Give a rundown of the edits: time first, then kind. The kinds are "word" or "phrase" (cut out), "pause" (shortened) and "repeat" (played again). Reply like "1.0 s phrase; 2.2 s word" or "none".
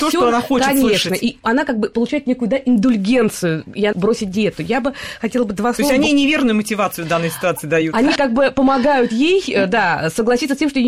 3.9 s word; 8.2 s word